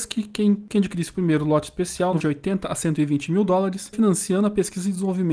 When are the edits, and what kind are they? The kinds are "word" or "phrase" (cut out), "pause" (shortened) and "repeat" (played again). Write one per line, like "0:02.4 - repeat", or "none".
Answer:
0:02.2 - word
0:03.9 - word

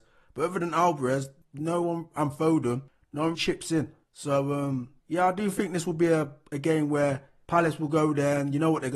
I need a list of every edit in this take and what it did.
0:03.3 - word
0:04.0 - pause
0:05.0 - pause

